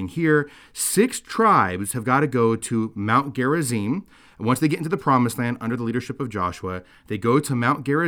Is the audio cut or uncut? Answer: uncut